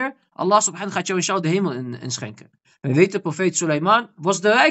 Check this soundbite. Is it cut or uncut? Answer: uncut